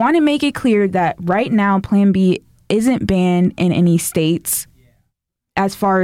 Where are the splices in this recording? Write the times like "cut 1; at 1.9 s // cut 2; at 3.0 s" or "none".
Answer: none